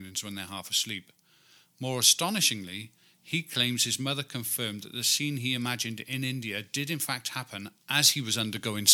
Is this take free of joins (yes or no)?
yes